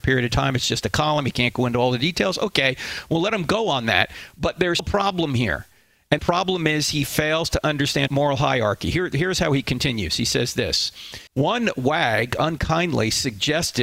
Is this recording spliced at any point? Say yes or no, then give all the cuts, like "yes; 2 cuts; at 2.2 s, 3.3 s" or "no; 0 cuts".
yes; 4 cuts; at 4.8 s, 6.2 s, 8.1 s, 11.3 s